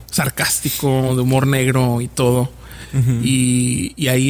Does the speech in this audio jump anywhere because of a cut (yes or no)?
no